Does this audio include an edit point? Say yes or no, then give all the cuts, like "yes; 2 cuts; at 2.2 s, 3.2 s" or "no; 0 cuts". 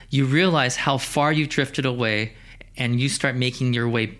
no; 0 cuts